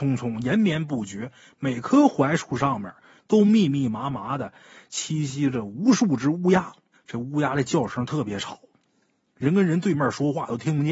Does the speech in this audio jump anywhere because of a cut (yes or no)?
yes